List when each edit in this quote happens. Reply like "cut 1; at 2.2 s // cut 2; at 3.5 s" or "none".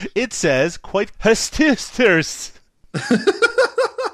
cut 1; at 1.1 s